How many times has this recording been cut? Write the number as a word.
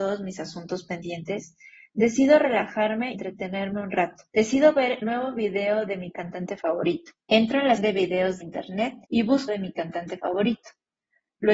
eight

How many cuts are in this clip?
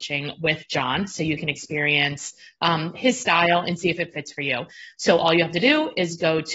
zero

